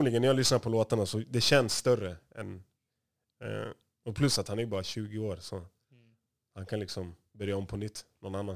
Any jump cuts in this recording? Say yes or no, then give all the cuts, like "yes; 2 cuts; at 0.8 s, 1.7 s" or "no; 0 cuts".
no; 0 cuts